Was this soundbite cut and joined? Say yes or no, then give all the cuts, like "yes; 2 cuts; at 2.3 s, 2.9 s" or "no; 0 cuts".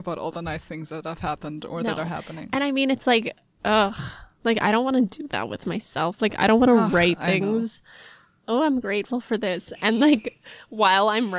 no; 0 cuts